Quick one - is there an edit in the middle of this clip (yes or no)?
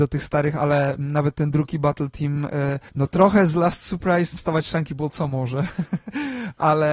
yes